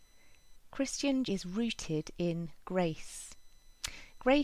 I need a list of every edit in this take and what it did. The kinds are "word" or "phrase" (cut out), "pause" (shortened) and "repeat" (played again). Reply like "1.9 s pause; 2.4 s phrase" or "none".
1.3 s word